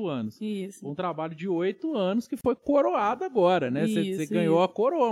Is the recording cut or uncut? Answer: uncut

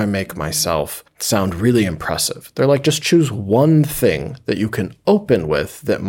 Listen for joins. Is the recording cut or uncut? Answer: uncut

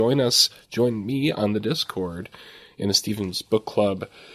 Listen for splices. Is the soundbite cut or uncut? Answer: uncut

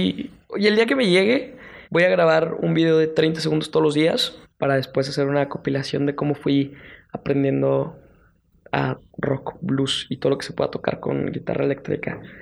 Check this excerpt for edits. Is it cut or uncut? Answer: cut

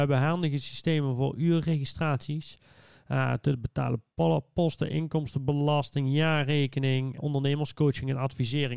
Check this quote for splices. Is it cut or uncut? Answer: cut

